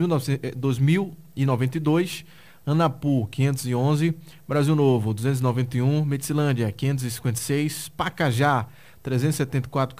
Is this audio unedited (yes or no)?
yes